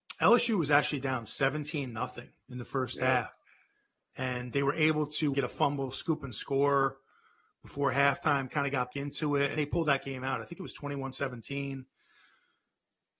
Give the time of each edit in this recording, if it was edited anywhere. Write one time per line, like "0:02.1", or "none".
0:04.5
0:05.3
0:08.9
0:09.6